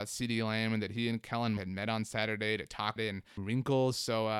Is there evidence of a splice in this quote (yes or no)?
yes